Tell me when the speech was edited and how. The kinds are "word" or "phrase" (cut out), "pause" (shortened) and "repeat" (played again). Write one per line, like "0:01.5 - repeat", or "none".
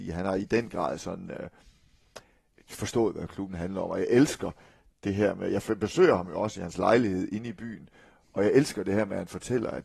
none